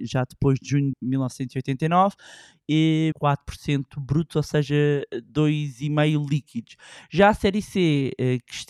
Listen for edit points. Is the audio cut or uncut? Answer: cut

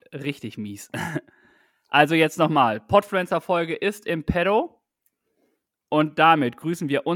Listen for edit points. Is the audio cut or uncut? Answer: uncut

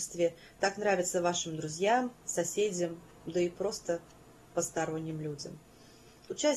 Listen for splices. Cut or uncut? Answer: uncut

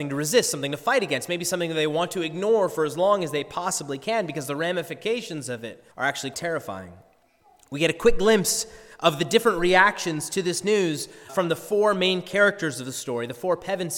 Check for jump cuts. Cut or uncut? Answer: cut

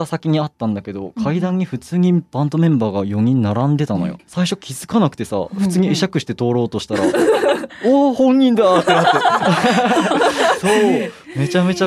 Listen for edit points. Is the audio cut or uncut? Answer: cut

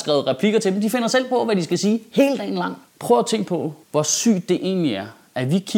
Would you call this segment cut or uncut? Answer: cut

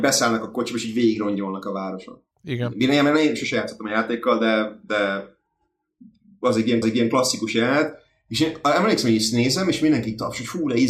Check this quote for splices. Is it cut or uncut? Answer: cut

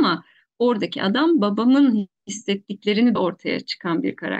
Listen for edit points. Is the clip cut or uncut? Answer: cut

